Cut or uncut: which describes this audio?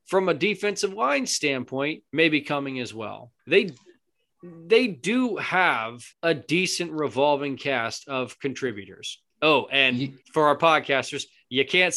cut